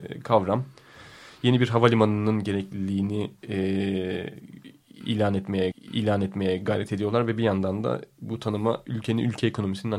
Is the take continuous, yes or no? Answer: no